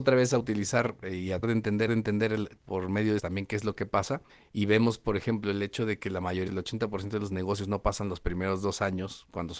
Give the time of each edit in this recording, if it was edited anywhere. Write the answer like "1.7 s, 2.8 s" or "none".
1.4 s, 1.9 s, 3.2 s, 4.3 s, 6.5 s